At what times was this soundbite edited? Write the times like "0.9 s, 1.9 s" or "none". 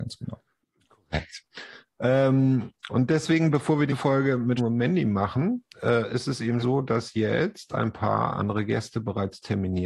2.9 s, 3.9 s, 4.6 s, 6.6 s